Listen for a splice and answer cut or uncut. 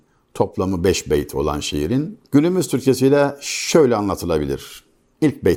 uncut